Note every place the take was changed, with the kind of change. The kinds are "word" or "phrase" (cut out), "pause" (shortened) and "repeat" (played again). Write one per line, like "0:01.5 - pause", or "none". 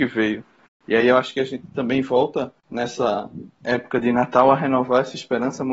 0:02.6 - pause